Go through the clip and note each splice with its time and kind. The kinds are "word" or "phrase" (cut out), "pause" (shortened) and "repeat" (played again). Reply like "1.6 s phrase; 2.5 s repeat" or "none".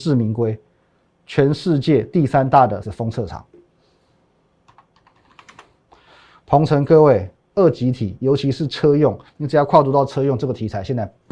2.8 s word